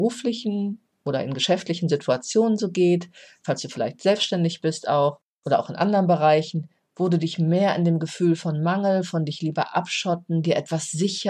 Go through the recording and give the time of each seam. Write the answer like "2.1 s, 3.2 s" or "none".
none